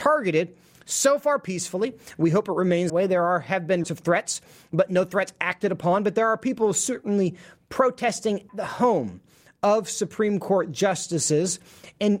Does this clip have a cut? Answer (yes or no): yes